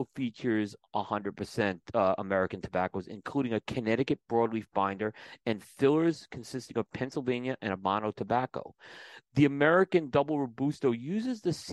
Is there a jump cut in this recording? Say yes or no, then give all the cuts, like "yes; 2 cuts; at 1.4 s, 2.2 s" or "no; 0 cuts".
no; 0 cuts